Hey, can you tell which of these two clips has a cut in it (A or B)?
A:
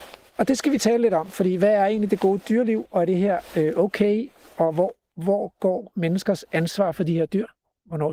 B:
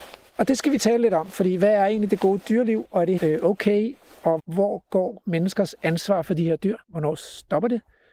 B